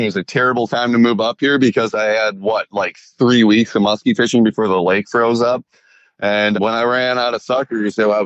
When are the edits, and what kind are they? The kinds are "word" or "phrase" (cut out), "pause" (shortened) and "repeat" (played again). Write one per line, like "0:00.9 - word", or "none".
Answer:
none